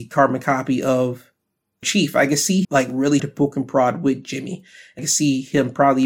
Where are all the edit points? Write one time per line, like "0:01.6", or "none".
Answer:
0:01.8
0:02.6
0:03.2
0:05.0